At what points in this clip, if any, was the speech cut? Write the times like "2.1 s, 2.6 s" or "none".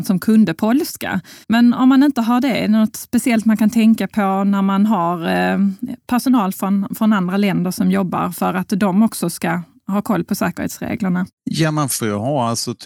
1.4 s, 11.4 s